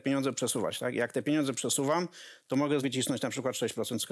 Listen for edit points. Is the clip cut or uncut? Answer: cut